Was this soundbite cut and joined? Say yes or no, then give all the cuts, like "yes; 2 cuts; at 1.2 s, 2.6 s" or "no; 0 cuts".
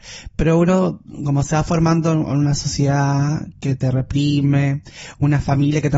no; 0 cuts